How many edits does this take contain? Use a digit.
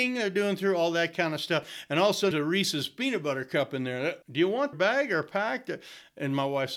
3